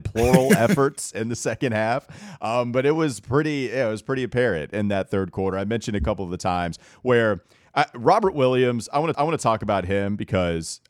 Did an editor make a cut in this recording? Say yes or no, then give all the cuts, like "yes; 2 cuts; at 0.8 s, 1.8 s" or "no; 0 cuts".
yes; 1 cut; at 9.1 s